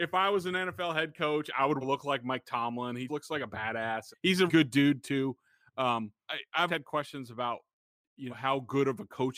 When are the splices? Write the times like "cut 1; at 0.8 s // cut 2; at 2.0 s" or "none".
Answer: cut 1; at 1.8 s // cut 2; at 3.1 s // cut 3; at 4.1 s // cut 4; at 4.5 s // cut 5; at 6.3 s // cut 6; at 6.7 s // cut 7; at 8.3 s